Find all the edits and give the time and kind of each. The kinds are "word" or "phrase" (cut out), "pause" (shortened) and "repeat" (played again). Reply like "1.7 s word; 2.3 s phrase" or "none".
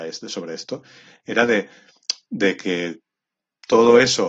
none